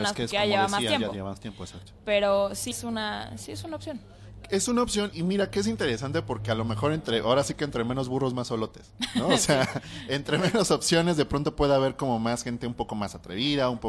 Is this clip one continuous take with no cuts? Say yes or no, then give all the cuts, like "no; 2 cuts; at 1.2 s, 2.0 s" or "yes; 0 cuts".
no; 2 cuts; at 2.7 s, 5.1 s